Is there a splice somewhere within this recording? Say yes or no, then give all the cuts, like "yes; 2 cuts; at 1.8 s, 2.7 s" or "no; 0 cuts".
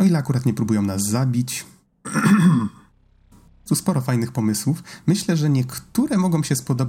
yes; 1 cut; at 3.7 s